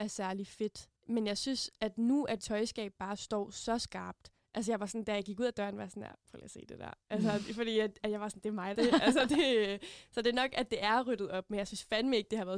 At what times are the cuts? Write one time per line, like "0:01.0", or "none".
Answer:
0:01.0
0:01.8
0:02.4
0:08.7